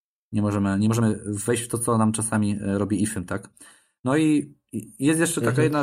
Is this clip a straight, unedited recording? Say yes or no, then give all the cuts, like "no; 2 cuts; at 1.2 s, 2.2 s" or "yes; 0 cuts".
yes; 0 cuts